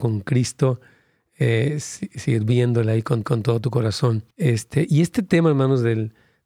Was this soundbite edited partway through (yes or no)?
yes